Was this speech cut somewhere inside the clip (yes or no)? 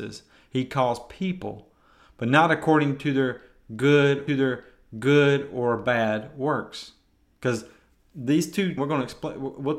yes